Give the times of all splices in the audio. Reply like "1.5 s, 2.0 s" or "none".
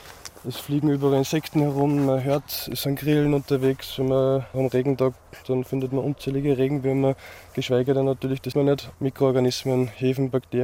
4.5 s, 8.5 s